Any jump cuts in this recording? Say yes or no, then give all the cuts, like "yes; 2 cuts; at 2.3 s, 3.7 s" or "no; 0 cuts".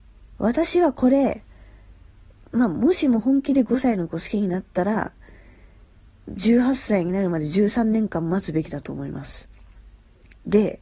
no; 0 cuts